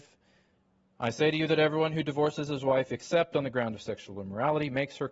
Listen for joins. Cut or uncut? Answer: uncut